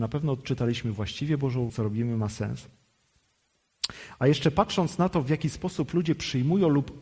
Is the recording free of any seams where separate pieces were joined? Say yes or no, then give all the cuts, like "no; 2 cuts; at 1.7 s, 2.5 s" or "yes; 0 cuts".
no; 1 cut; at 1.7 s